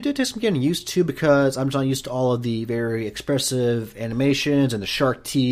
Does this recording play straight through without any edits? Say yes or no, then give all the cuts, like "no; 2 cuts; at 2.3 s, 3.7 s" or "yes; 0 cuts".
yes; 0 cuts